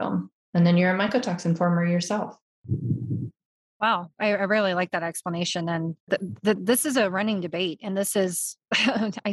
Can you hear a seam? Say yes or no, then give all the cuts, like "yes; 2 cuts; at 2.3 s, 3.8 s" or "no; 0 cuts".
yes; 1 cut; at 6.0 s